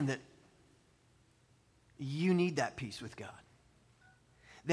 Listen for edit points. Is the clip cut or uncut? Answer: uncut